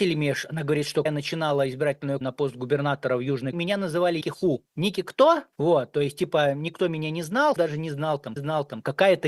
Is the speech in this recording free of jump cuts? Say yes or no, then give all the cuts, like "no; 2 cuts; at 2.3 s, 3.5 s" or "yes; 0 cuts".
no; 8 cuts; at 1.1 s, 2.2 s, 3.5 s, 4.2 s, 4.7 s, 5.5 s, 7.6 s, 8.4 s